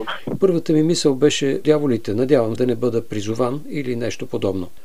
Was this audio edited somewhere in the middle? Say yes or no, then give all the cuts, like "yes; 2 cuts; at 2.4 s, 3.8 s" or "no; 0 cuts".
yes; 2 cuts; at 1.6 s, 2.6 s